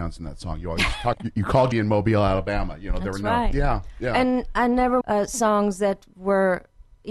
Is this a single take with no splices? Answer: no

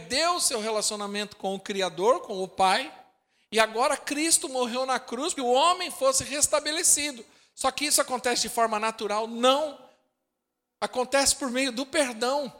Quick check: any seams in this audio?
yes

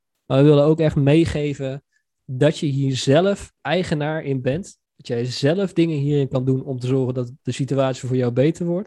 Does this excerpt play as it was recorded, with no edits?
no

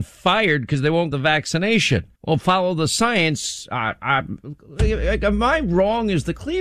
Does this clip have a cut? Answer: yes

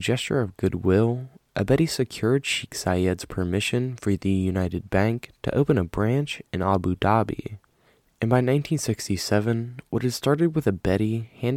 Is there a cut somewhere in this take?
no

